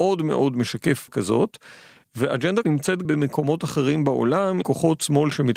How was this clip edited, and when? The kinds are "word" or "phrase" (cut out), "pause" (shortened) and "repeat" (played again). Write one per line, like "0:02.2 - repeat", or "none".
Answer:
0:01.1 - word
0:02.6 - word
0:03.0 - word
0:04.6 - word